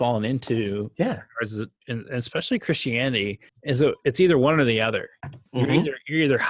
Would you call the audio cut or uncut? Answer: cut